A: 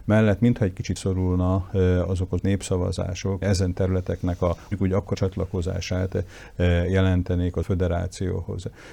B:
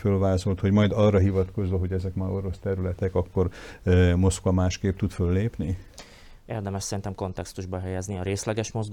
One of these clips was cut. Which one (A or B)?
A